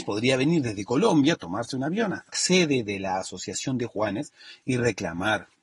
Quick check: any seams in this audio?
yes; 1 cut; at 2.3 s

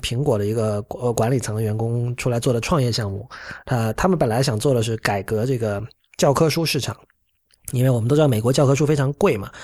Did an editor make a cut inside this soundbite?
no; 0 cuts

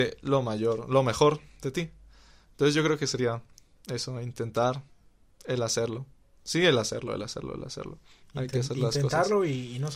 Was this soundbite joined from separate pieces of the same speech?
no; 0 cuts

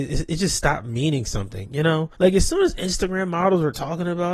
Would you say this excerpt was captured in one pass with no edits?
no; 1 cut; at 2.1 s

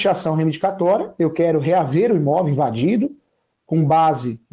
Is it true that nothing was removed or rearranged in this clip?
yes; 0 cuts

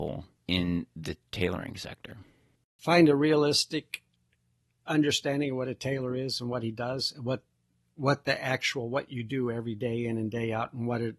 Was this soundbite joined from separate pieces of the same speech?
no; 0 cuts

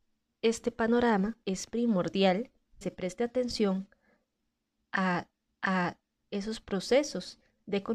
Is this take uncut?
no; 3 cuts; at 1.4 s, 2.8 s, 5.5 s

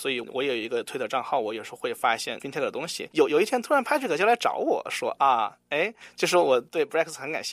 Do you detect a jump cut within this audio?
no; 0 cuts

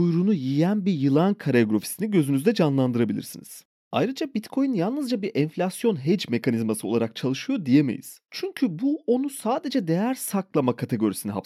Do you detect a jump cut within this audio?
no; 0 cuts

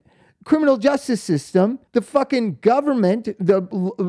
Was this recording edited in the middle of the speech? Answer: yes; 1 cut; at 1.9 s

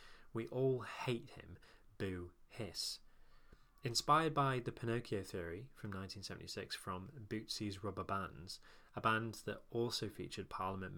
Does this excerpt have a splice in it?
no; 0 cuts

